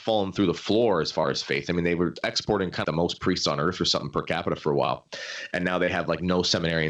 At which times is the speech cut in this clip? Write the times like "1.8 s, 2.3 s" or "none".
2.8 s